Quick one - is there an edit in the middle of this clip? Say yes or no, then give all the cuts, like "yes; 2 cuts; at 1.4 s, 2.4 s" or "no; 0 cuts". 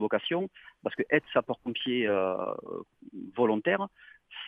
no; 0 cuts